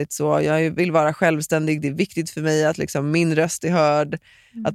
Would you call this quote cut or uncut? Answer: uncut